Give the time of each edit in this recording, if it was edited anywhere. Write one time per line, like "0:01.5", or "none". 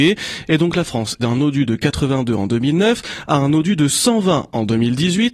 0:01.2